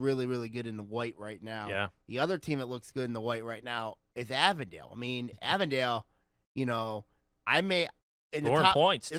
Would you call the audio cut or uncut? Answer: uncut